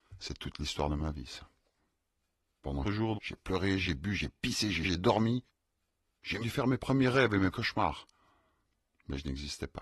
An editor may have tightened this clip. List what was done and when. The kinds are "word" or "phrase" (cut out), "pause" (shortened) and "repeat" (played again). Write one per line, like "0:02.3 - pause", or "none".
0:02.8 - word
0:03.1 - word
0:03.8 - word
0:04.8 - word
0:06.4 - word
0:07.5 - word

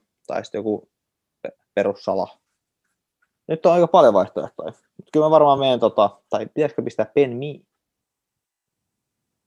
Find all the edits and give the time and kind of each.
none

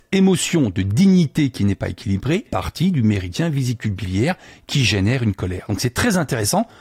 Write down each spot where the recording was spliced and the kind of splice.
0:02.5 - word

